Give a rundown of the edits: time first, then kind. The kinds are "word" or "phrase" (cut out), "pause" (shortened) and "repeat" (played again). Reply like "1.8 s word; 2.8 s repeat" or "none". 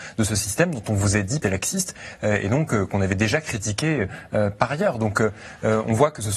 1.4 s phrase